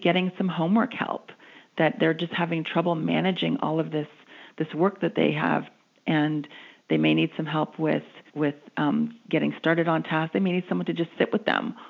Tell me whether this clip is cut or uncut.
cut